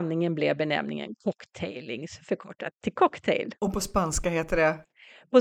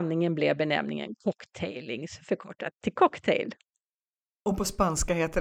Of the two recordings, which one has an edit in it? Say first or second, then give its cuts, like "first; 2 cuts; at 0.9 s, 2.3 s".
first; 1 cut; at 3.6 s